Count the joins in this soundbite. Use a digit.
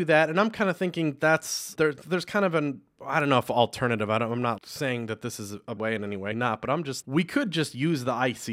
5